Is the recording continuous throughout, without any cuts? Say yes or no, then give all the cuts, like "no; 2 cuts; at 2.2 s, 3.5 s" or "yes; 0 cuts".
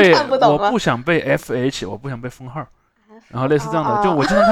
yes; 0 cuts